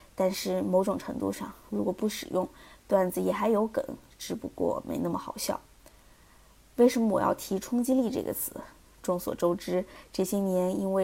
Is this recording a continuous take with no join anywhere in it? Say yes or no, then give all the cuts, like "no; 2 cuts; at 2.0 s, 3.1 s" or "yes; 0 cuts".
yes; 0 cuts